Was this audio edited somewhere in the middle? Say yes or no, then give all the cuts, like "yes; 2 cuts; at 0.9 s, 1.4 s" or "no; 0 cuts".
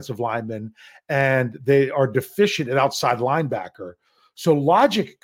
no; 0 cuts